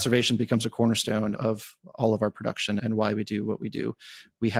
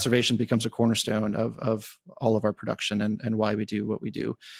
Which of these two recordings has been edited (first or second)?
first